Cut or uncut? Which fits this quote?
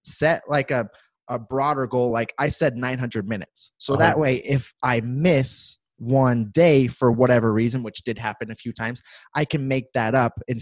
uncut